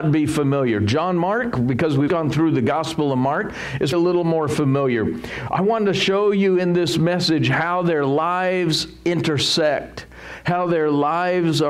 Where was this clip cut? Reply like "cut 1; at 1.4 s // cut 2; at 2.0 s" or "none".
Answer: cut 1; at 2.1 s // cut 2; at 3.9 s